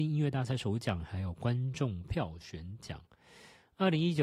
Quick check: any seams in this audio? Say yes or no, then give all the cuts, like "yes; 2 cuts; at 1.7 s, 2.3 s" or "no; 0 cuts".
no; 0 cuts